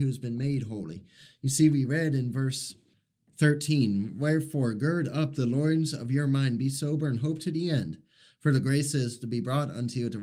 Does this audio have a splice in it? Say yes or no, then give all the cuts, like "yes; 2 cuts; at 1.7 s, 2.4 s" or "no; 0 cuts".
no; 0 cuts